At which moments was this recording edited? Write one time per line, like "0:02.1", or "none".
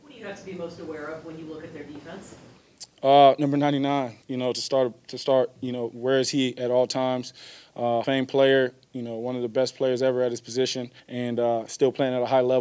0:04.2
0:08.0
0:11.0